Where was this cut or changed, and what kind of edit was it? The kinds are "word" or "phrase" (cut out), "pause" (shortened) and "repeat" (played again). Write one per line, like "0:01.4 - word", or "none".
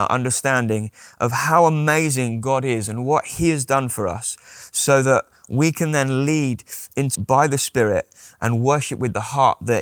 0:07.1 - word